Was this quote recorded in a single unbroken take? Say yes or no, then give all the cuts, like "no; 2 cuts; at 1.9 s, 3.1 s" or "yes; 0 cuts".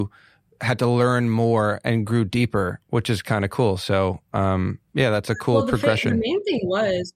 no; 1 cut; at 4.9 s